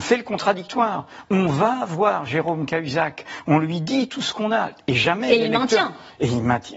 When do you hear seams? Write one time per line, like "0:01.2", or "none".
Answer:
none